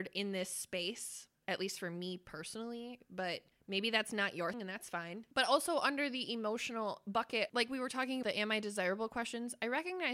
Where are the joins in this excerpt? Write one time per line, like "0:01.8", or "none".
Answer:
0:04.5
0:08.2